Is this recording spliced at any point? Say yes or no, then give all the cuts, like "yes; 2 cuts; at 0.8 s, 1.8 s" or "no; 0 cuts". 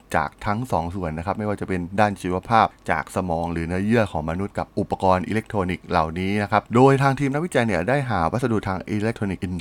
yes; 1 cut; at 6.7 s